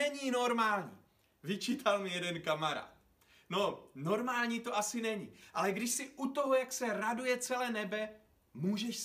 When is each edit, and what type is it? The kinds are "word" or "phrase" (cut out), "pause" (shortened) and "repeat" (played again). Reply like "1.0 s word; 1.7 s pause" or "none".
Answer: none